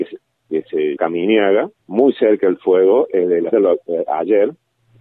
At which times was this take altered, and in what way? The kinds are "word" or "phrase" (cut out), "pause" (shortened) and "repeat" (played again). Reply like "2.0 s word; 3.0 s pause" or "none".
1.0 s word; 1.8 s pause; 3.5 s word